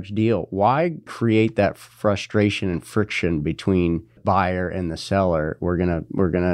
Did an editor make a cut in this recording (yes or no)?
yes